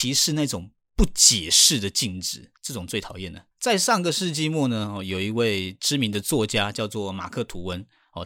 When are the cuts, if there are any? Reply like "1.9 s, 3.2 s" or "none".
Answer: 2.6 s, 3.5 s